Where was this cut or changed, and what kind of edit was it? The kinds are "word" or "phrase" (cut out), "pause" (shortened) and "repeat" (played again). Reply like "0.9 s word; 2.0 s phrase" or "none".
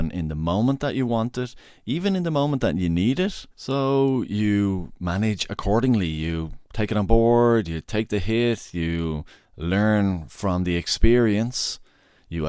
3.5 s pause; 9.3 s pause